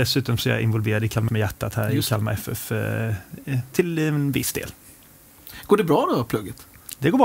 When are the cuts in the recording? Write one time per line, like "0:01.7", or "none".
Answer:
0:01.3